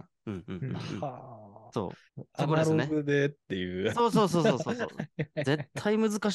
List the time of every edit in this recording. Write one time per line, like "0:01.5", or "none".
0:02.1